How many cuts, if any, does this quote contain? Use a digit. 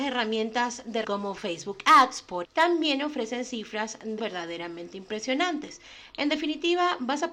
3